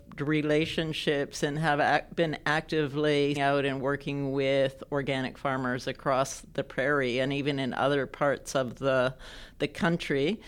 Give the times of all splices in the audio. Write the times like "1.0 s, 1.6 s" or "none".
3.4 s